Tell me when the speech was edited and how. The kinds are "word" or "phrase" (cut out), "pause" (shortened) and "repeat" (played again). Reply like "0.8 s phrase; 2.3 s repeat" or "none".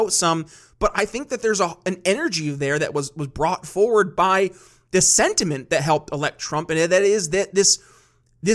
none